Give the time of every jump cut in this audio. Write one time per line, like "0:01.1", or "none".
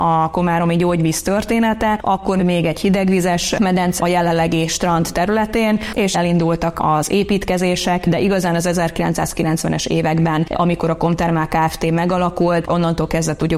0:04.0
0:06.1